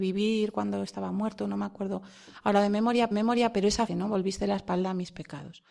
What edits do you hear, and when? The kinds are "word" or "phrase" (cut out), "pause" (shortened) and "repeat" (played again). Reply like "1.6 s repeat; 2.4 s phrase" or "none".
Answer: 3.1 s repeat; 3.9 s word